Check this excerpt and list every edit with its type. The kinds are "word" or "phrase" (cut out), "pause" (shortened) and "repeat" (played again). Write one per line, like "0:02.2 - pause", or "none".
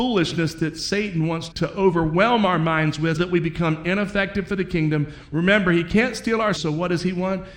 0:01.5 - word
0:03.2 - word
0:06.6 - word